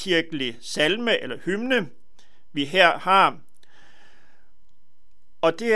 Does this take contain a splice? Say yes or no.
no